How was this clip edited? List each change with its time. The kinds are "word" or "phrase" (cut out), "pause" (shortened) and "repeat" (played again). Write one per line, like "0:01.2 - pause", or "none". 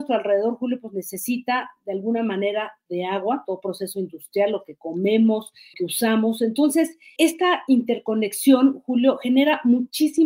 0:05.7 - word
0:07.2 - word